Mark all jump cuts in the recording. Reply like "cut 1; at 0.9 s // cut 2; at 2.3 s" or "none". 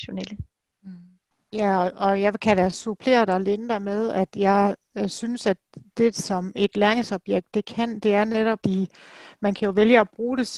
cut 1; at 8.6 s